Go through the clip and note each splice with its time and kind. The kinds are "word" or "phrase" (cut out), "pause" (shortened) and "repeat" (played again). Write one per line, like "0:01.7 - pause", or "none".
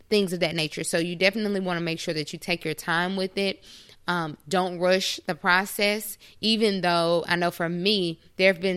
none